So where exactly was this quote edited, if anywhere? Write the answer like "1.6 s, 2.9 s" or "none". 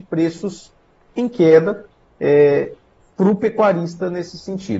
none